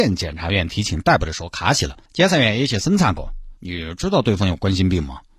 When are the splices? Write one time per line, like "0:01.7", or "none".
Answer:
0:02.1
0:03.6